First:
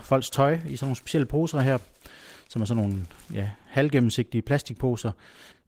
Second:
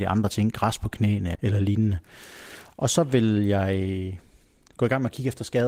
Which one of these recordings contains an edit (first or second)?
second